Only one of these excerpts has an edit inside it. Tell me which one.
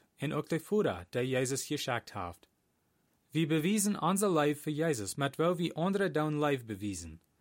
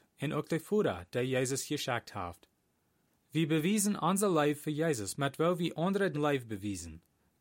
second; 1 cut; at 6.1 s

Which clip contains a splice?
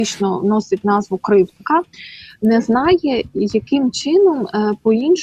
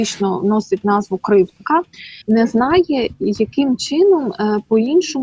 second; 1 cut; at 2.2 s

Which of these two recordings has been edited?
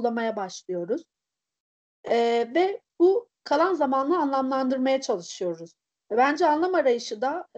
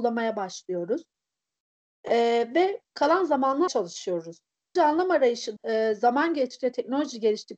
second; 4 cuts; at 2.9 s, 3.7 s, 4.8 s, 5.6 s

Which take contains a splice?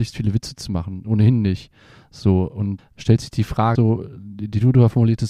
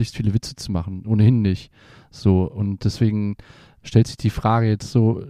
first; 2 cuts; at 2.8 s, 3.7 s

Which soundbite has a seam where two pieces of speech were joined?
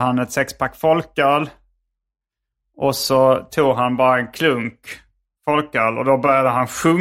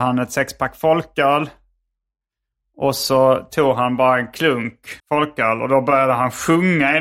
second; 1 cut; at 5.0 s

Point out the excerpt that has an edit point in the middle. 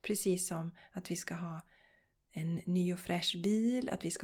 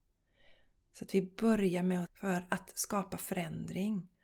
second; 1 cut; at 2.1 s

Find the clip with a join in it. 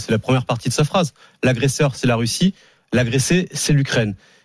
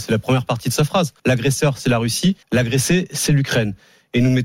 second; 2 cuts; at 1.2 s, 2.4 s

